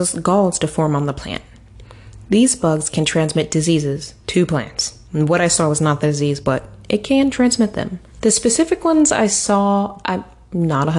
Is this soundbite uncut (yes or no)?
no